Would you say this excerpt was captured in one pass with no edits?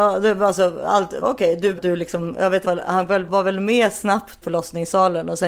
no; 5 cuts; at 1.2 s, 1.8 s, 2.6 s, 3.3 s, 4.4 s

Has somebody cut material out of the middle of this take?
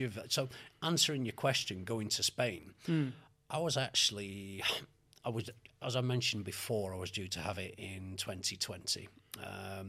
no; 0 cuts

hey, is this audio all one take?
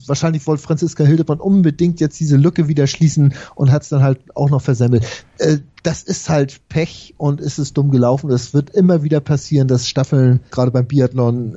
no; 1 cut; at 10.5 s

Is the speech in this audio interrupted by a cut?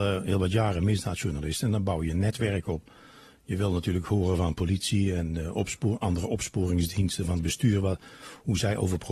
no; 0 cuts

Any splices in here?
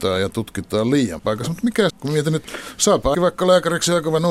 yes; 3 cuts; at 1.2 s, 1.9 s, 3.1 s

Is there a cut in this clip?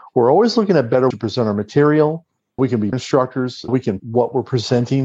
yes; 5 cuts; at 1.1 s, 2.6 s, 2.9 s, 3.7 s, 4.0 s

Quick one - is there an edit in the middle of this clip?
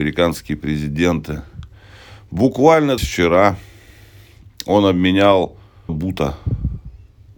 yes; 2 cuts; at 3.0 s, 5.9 s

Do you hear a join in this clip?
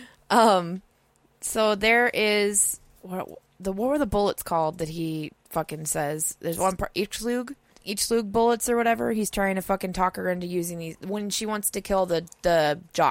no; 0 cuts

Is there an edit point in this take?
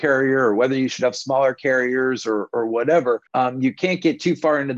yes; 1 cut; at 3.3 s

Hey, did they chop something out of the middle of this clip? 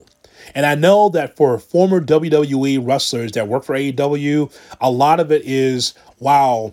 no; 0 cuts

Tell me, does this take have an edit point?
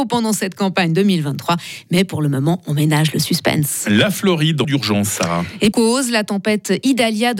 yes; 2 cuts; at 4.6 s, 5.7 s

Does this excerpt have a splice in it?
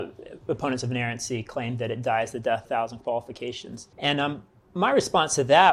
yes; 2 cuts; at 2.6 s, 3.9 s

